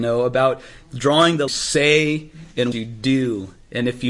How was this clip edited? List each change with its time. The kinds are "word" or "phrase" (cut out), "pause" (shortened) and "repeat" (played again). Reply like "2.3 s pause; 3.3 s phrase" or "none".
1.5 s phrase; 2.7 s word

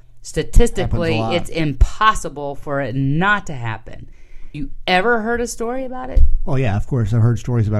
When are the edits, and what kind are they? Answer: 4.5 s word

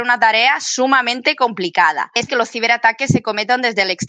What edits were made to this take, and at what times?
2.3 s word

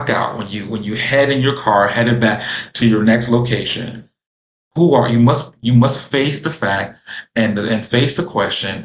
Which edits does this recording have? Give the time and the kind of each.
none

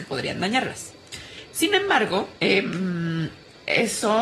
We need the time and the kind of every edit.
2.4 s pause

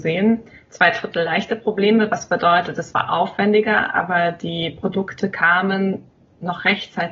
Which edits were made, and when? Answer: none

